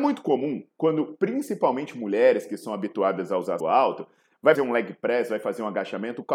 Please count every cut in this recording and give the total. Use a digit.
2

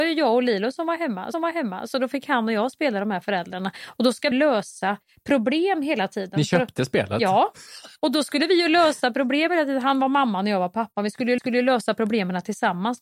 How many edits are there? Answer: 4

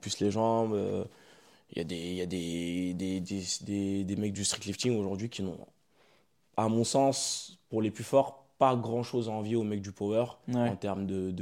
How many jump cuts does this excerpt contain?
0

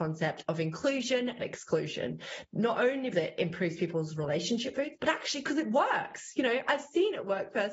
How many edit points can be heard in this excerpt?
4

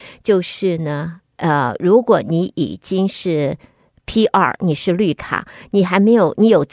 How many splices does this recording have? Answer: 0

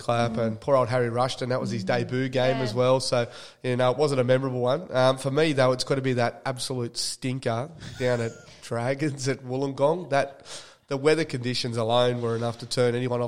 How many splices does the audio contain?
0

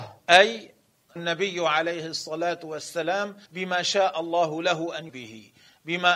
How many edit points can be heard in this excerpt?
3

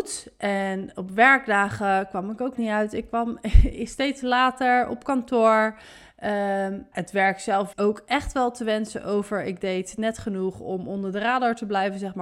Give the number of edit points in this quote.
3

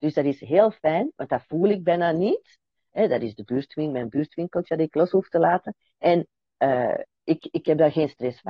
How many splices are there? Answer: 0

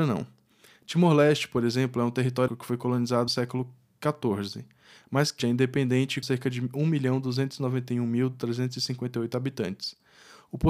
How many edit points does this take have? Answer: 4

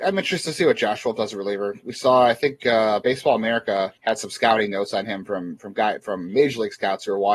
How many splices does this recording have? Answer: 1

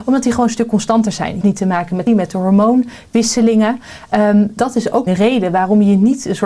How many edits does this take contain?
4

